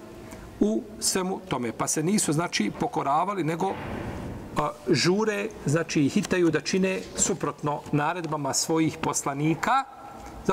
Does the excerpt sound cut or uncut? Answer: uncut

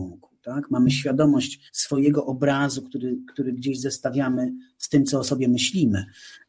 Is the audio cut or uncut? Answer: cut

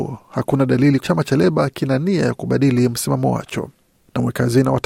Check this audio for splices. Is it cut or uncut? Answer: cut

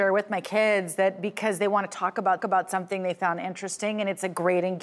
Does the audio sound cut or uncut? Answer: cut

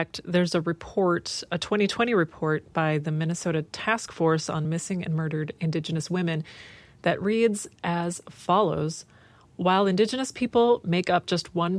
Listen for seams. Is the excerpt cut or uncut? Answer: uncut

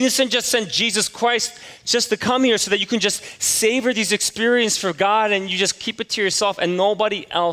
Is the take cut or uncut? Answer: uncut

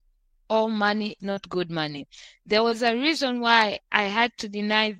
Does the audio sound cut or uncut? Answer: cut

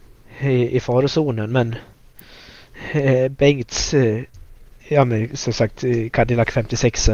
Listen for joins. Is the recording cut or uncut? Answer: uncut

